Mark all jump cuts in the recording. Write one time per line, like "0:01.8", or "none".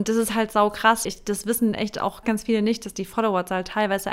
0:01.0
0:02.2